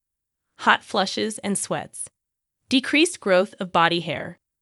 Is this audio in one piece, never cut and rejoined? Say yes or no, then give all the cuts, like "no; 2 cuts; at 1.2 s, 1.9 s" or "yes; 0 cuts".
yes; 0 cuts